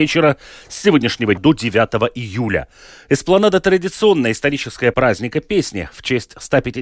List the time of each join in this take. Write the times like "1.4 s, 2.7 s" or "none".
1.4 s, 4.9 s